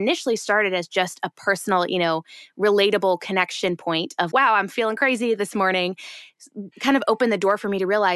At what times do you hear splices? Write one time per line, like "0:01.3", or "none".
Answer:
0:04.3
0:06.7